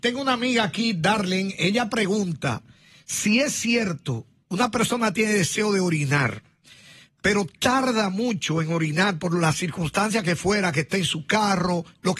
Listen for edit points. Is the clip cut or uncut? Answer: uncut